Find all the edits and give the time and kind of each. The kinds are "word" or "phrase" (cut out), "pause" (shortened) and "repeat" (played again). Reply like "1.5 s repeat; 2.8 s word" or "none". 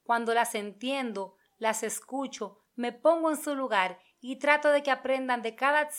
none